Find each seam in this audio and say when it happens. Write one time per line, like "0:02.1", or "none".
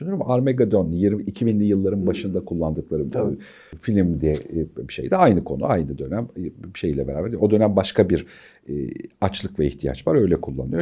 none